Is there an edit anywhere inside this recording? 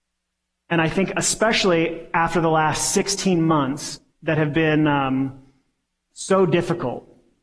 no; 0 cuts

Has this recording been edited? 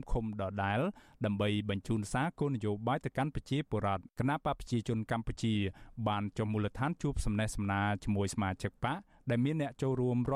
yes; 1 cut; at 4.1 s

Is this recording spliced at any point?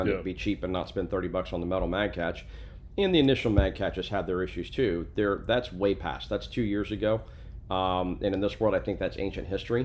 no; 0 cuts

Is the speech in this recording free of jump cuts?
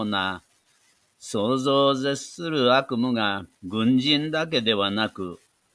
no; 1 cut; at 3.5 s

